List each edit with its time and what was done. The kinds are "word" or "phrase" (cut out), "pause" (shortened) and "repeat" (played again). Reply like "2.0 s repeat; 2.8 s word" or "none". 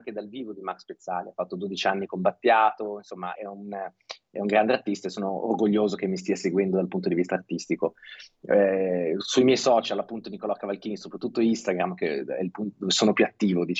3.4 s word